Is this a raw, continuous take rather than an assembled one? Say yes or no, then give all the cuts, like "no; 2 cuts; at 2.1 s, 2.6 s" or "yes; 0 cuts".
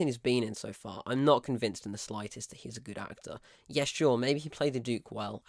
yes; 0 cuts